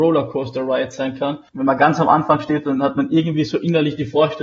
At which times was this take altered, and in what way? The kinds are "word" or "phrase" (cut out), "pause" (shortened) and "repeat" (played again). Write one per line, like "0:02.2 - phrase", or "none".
0:01.5 - pause